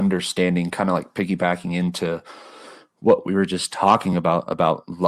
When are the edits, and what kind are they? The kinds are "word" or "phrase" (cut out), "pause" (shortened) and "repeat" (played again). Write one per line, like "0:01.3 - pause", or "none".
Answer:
none